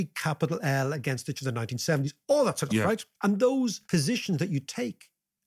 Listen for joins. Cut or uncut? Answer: cut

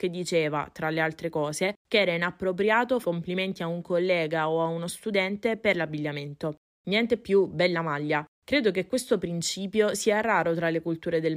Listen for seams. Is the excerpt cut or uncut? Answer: cut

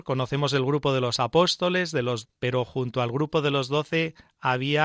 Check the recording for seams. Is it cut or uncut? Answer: cut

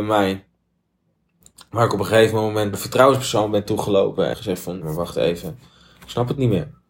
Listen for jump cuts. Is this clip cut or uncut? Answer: cut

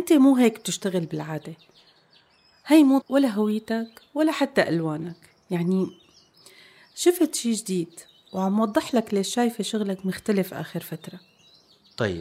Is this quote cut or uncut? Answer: cut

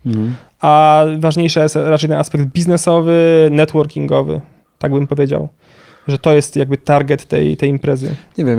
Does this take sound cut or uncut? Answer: uncut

